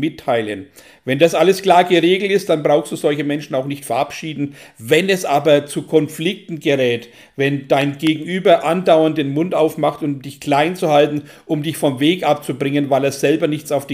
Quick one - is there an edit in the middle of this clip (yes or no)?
no